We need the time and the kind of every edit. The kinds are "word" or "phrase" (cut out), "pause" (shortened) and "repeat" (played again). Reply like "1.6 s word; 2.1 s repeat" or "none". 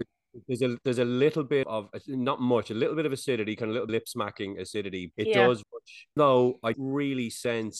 1.6 s word; 3.9 s word; 5.1 s word; 5.6 s word; 6.2 s word; 6.7 s word